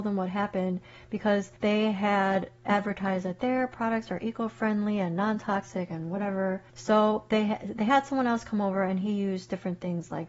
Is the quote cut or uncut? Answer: cut